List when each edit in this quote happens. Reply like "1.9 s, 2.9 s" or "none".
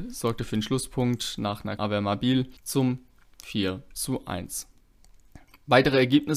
1.8 s, 2.6 s